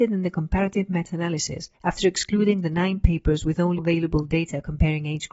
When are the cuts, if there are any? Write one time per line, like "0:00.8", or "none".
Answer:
0:01.7
0:03.8